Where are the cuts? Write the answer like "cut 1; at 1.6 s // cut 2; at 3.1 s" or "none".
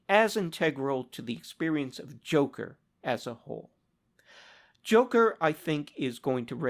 none